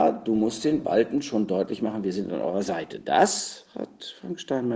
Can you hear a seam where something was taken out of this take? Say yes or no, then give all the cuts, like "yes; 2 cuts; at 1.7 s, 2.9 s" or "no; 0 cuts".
no; 0 cuts